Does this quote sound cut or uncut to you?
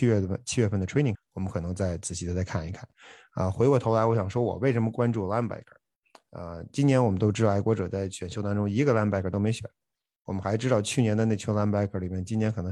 cut